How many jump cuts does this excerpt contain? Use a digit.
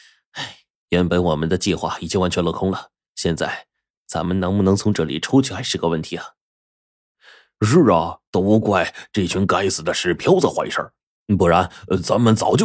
1